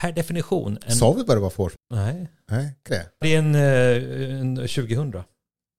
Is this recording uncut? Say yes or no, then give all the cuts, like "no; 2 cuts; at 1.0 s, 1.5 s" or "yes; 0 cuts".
no; 3 cuts; at 1.8 s, 2.9 s, 3.2 s